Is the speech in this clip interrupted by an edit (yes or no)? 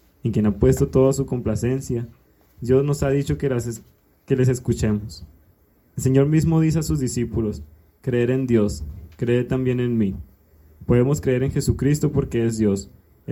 no